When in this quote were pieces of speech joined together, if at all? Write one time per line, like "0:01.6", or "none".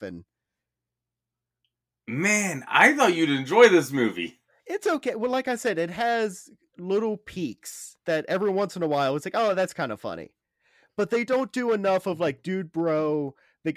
0:08.0